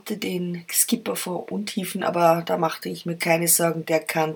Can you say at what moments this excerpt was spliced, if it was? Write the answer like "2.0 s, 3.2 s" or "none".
none